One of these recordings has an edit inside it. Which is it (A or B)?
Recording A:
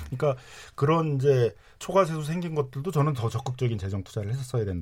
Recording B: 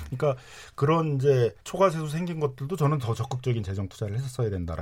B